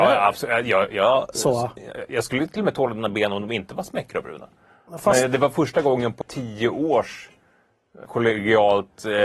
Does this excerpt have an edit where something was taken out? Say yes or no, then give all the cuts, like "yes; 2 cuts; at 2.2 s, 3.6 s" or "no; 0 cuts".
yes; 2 cuts; at 6.2 s, 8.1 s